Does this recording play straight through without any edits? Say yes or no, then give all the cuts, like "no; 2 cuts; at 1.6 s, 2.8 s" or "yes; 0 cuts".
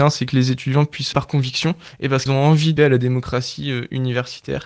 no; 3 cuts; at 1.1 s, 2.3 s, 2.8 s